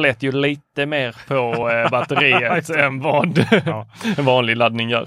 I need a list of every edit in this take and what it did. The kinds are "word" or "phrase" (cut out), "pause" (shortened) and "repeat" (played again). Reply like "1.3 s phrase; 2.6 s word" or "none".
none